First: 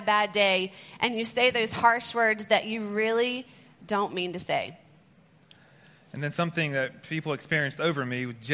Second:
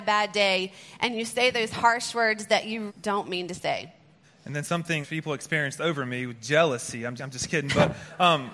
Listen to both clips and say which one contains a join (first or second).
second